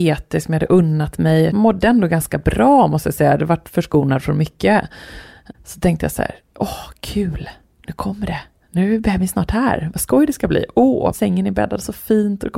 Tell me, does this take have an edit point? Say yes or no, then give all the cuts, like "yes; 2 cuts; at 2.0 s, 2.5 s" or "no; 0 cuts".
no; 0 cuts